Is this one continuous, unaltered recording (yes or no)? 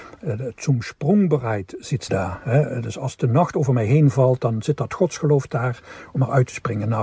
no